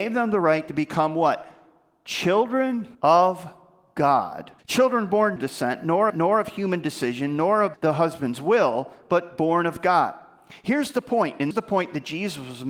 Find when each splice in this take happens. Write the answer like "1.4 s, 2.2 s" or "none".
2.9 s, 4.6 s, 5.4 s, 6.1 s, 7.7 s, 11.5 s